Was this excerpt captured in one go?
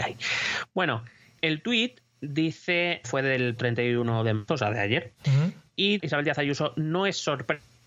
no; 5 cuts; at 1.4 s, 3.0 s, 3.6 s, 4.5 s, 6.0 s

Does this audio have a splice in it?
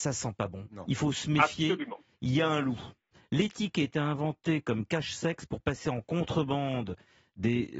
no; 0 cuts

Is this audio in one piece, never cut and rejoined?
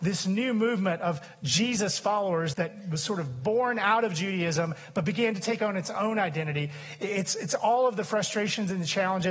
no; 1 cut; at 2.5 s

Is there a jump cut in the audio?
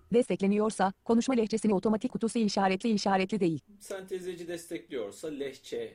yes; 2 cuts; at 2.1 s, 2.8 s

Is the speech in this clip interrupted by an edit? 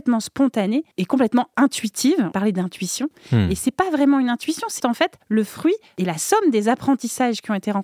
yes; 4 cuts; at 0.9 s, 2.3 s, 4.8 s, 5.2 s

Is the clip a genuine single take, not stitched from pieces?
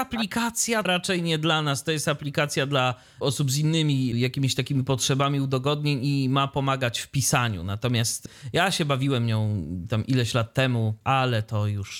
yes; 0 cuts

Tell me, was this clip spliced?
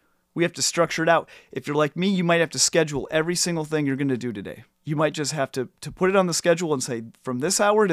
yes; 1 cut; at 4.7 s

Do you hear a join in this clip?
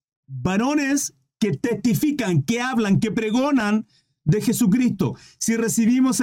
no; 0 cuts

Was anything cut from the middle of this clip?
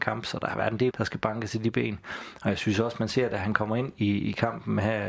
yes; 1 cut; at 0.9 s

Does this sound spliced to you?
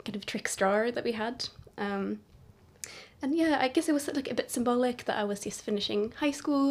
no; 0 cuts

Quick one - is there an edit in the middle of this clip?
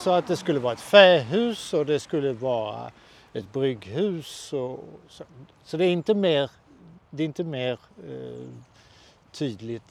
no; 0 cuts

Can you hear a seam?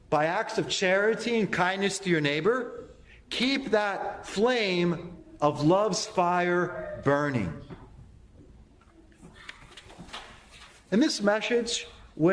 no; 0 cuts

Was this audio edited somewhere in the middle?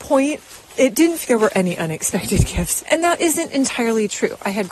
yes; 2 cuts; at 1.2 s, 2.8 s

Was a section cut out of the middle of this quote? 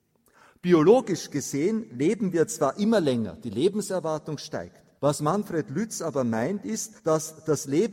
yes; 2 cuts; at 5.0 s, 7.0 s

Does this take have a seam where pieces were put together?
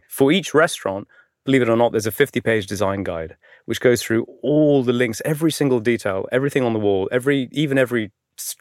no; 0 cuts

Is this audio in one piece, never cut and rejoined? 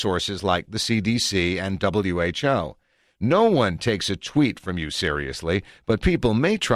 yes; 0 cuts

